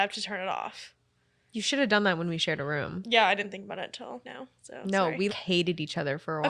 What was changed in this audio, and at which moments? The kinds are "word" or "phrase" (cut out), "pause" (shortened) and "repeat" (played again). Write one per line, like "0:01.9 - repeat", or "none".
0:04.2 - word
0:05.3 - word